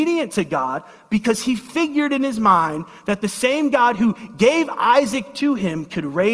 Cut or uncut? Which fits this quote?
uncut